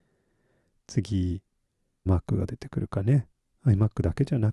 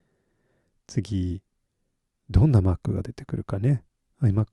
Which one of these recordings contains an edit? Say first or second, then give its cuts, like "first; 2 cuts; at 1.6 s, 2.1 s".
first; 1 cut; at 2.1 s